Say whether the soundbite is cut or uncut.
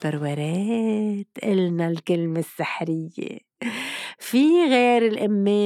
uncut